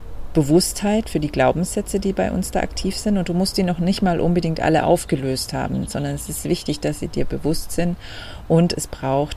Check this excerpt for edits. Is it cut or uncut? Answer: uncut